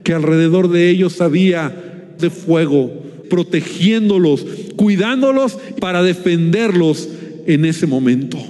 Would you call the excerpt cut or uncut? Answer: cut